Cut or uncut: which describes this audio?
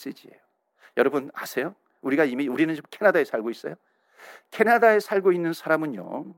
uncut